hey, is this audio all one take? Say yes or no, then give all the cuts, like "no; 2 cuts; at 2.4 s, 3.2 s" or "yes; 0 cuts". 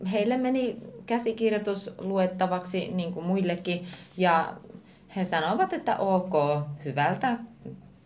yes; 0 cuts